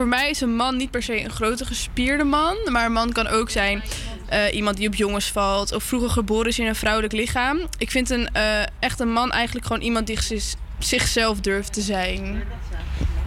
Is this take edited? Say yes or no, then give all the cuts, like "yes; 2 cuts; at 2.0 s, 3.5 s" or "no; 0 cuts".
no; 0 cuts